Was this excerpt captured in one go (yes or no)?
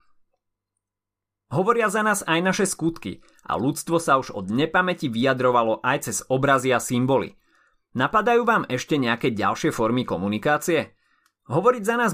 yes